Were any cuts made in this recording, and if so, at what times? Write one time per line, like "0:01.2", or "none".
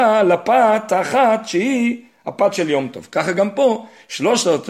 none